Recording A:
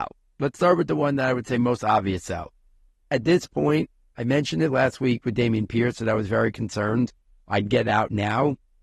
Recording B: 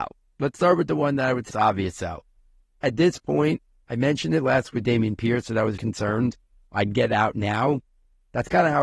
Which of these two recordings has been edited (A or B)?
B